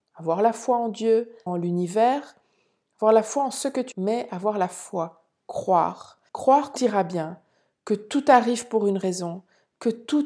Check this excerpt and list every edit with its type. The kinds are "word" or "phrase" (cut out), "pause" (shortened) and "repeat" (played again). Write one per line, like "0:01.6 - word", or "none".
0:01.5 - phrase
0:03.9 - word
0:06.3 - pause
0:06.8 - phrase

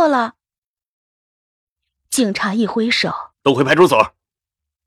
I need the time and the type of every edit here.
0:03.3 - pause

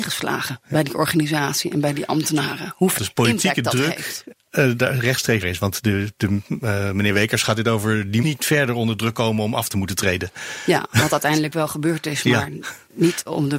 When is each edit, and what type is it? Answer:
0:03.0 - phrase
0:05.4 - word
0:08.2 - word

